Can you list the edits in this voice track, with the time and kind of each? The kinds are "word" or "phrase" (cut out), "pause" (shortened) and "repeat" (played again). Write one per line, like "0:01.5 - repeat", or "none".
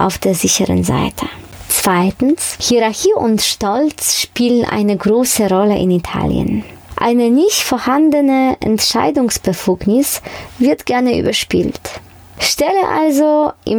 none